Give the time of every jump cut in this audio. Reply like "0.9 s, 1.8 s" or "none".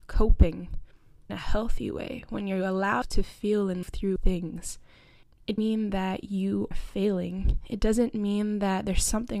1.3 s, 3.0 s, 3.8 s, 4.2 s, 5.6 s, 6.7 s